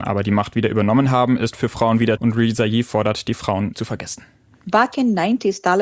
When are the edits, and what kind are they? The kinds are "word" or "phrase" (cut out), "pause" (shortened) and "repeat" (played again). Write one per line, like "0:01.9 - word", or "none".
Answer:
0:01.5 - word
0:02.2 - word
0:03.7 - word